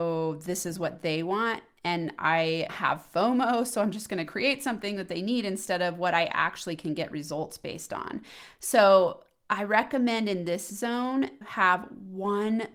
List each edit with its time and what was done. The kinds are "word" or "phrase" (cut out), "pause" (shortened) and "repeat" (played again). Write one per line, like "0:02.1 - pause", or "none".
0:02.7 - word
0:11.4 - word